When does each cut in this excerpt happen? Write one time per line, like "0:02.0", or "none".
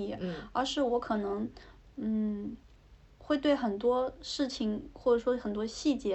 none